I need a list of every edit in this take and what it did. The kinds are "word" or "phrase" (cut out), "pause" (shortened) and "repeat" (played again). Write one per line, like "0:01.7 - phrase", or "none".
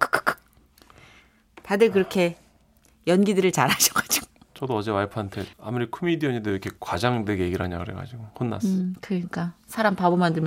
0:05.5 - pause
0:06.8 - pause
0:08.3 - pause